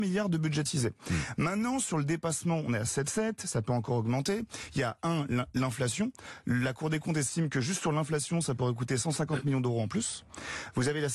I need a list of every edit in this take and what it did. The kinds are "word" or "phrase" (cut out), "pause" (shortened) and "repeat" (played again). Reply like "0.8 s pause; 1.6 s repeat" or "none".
none